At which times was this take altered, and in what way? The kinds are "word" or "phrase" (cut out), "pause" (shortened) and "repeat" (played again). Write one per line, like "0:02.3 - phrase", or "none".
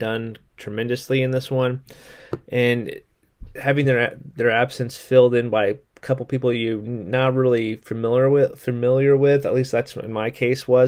none